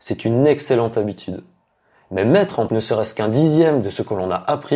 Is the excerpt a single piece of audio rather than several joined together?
no; 1 cut; at 2.7 s

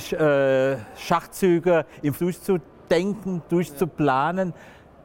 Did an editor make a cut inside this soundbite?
yes; 1 cut; at 2.2 s

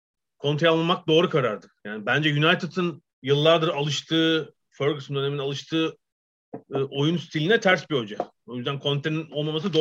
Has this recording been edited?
yes; 1 cut; at 3.1 s

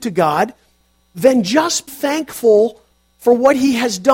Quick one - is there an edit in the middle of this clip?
yes; 1 cut; at 1.9 s

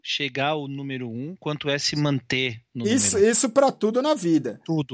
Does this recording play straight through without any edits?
yes; 0 cuts

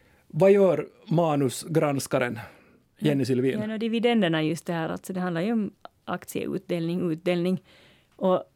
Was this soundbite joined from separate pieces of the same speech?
no; 0 cuts

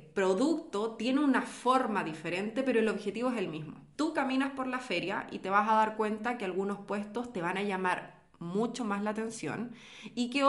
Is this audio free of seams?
no; 1 cut; at 3.9 s

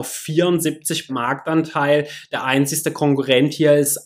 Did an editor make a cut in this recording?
yes; 1 cut; at 1.1 s

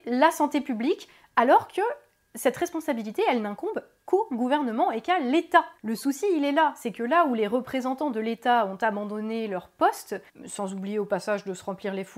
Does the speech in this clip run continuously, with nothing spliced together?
yes; 0 cuts

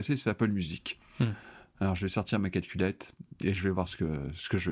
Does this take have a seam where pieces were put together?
no; 0 cuts

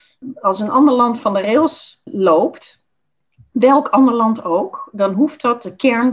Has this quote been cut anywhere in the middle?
no; 0 cuts

